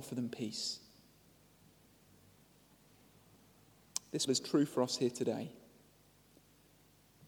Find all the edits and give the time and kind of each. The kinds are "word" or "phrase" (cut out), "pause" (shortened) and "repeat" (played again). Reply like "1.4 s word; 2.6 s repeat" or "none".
4.3 s word

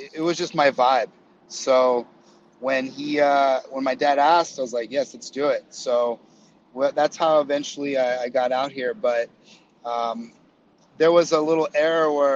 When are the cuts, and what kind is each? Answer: none

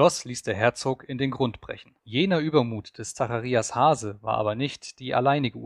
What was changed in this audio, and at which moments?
2.0 s pause

